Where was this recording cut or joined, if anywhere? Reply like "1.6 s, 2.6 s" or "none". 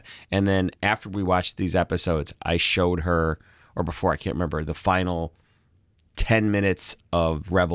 none